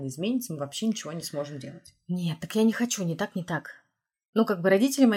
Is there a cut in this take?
no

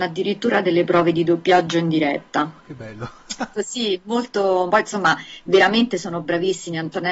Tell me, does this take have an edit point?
yes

